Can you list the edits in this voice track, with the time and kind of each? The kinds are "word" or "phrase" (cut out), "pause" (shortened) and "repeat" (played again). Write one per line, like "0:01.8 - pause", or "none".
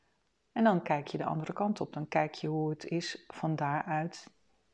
none